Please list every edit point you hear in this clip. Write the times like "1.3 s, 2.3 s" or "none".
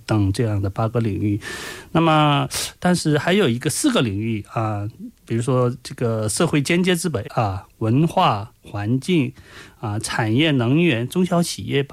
7.2 s